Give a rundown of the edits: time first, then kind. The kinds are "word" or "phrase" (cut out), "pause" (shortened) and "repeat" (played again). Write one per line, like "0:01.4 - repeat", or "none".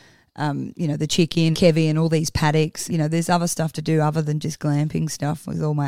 0:01.5 - word
0:02.9 - word
0:04.4 - word